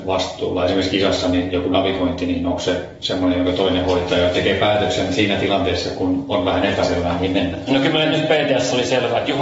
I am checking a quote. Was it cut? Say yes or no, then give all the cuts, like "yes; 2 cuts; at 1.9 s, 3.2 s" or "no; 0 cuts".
no; 0 cuts